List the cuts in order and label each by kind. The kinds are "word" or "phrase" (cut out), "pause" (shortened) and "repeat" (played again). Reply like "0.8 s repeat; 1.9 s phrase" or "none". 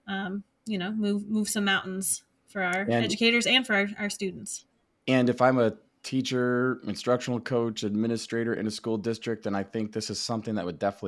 none